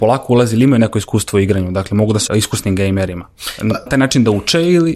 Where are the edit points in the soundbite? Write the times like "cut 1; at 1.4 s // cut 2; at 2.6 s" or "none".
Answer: cut 1; at 2.3 s // cut 2; at 3.9 s